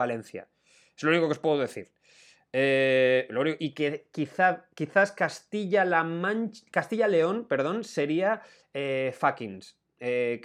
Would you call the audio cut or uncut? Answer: uncut